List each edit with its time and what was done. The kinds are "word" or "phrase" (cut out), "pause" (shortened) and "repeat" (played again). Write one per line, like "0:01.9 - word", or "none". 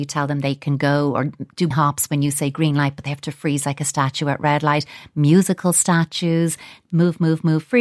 0:01.7 - word